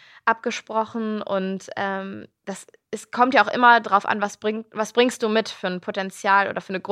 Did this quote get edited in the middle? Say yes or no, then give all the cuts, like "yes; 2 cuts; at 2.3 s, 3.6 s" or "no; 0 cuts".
no; 0 cuts